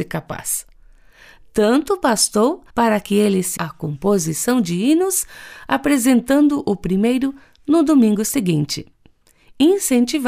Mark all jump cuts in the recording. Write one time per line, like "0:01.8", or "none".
0:02.7
0:03.6